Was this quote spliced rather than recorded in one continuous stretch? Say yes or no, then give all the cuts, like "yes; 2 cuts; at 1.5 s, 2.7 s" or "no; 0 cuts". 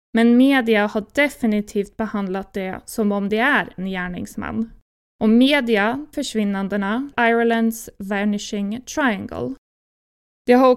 yes; 3 cuts; at 3.8 s, 6.1 s, 7.1 s